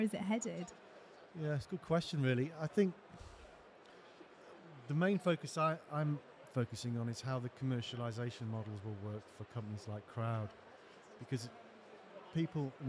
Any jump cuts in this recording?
no; 0 cuts

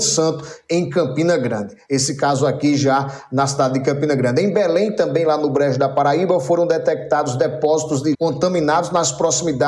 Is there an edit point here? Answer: yes; 1 cut; at 8.1 s

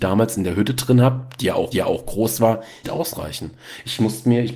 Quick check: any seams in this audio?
yes; 2 cuts; at 1.7 s, 2.8 s

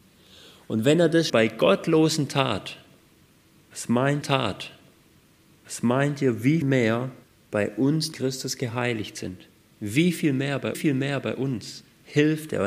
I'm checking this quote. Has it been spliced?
yes; 6 cuts; at 1.3 s, 4.2 s, 6.6 s, 7.2 s, 8.1 s, 10.7 s

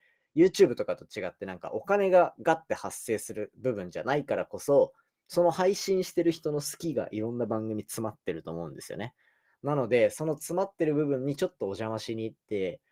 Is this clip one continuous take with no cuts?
yes; 0 cuts

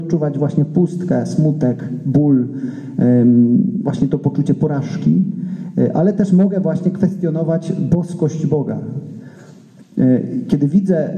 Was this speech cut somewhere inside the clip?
no; 0 cuts

